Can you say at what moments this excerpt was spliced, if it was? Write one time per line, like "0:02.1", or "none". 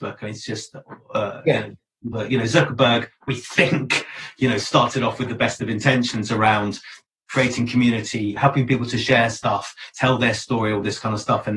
0:02.1
0:07.2
0:08.4